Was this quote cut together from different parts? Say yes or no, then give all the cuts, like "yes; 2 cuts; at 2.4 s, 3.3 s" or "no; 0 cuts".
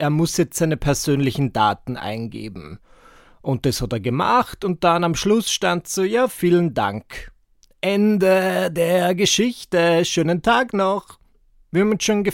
no; 0 cuts